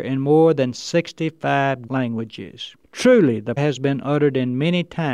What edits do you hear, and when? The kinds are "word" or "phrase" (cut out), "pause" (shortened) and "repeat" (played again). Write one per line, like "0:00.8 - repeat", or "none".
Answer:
0:01.9 - word
0:02.8 - pause
0:03.6 - word